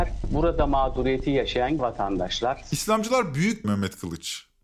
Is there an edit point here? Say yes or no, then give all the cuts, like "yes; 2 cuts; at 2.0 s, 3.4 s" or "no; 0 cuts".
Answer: yes; 2 cuts; at 1.8 s, 3.6 s